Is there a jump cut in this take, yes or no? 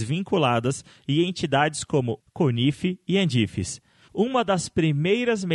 yes